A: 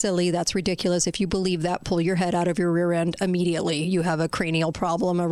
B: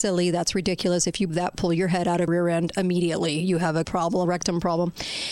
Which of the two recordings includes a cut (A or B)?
B